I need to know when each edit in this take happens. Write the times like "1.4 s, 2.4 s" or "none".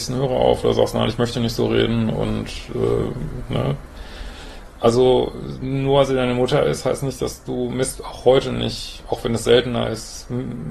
none